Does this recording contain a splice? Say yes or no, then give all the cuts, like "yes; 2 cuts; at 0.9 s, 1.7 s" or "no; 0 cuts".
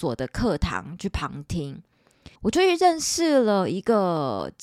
yes; 1 cut; at 2.4 s